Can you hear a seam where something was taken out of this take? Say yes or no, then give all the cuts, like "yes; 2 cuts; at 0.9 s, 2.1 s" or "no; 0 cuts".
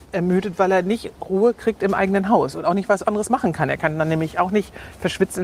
no; 0 cuts